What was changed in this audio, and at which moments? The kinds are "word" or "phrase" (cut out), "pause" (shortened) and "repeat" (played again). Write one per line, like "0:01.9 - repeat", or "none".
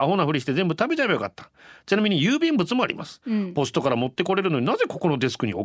none